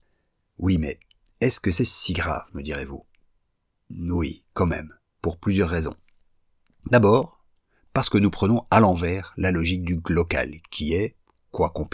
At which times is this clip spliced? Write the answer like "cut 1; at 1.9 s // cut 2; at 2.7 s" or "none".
none